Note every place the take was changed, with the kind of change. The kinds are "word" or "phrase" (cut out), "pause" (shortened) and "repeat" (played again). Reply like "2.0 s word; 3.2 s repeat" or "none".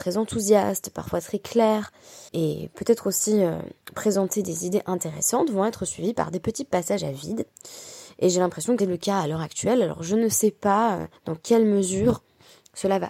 2.3 s pause; 3.8 s pause; 8.8 s word; 11.2 s pause

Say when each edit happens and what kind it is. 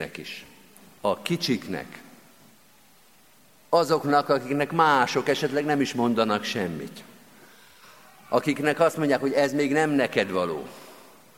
none

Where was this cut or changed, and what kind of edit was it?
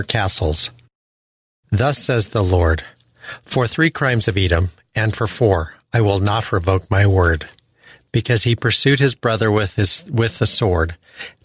none

